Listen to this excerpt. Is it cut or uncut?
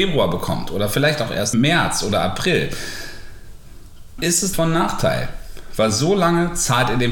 cut